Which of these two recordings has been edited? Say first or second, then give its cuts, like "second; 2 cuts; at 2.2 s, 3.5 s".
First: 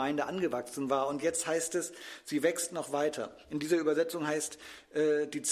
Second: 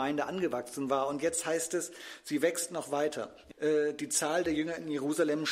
second; 1 cut; at 3.5 s